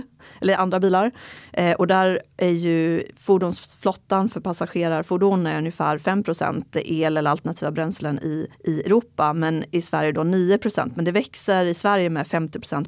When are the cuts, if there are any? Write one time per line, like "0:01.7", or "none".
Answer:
0:08.5

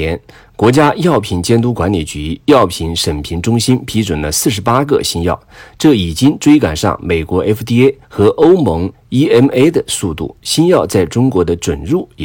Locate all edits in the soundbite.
0:08.0
0:08.9
0:10.4

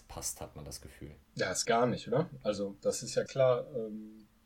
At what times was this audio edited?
0:01.2
0:01.6
0:03.3

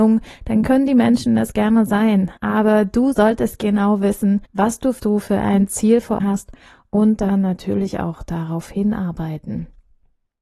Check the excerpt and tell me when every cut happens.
0:02.4
0:03.1
0:04.5
0:05.0
0:06.2

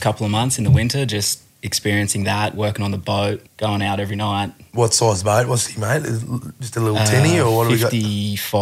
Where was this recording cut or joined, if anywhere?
0:01.5
0:03.5

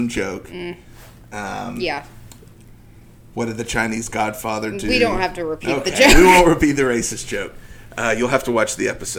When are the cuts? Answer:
none

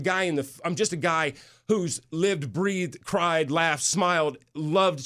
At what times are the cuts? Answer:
none

